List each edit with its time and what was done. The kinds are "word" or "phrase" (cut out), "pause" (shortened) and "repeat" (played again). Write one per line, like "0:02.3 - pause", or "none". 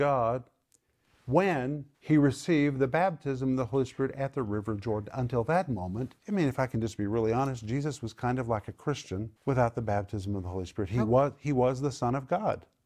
0:01.9 - pause
0:06.2 - pause
0:09.4 - pause